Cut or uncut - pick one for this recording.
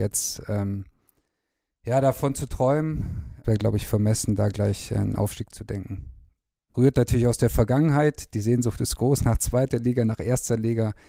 cut